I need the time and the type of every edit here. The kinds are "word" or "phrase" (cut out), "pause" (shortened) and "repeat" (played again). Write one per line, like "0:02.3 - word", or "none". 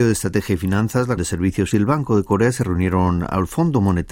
0:01.2 - word
0:01.7 - word